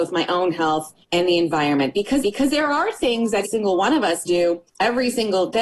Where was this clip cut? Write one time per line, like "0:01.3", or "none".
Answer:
0:01.0
0:02.2
0:03.4
0:04.3
0:04.7